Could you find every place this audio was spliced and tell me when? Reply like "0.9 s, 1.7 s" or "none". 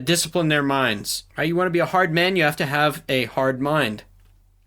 1.3 s